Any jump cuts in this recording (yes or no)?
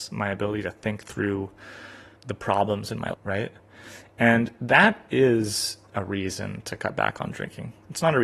yes